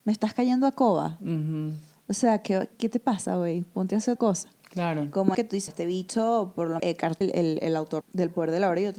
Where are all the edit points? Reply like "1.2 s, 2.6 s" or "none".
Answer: 2.7 s, 4.2 s, 5.3 s, 5.7 s, 6.8 s, 7.2 s, 8.0 s